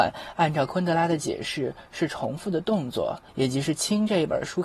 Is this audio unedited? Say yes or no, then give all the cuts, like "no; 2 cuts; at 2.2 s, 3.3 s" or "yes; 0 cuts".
no; 1 cut; at 3.3 s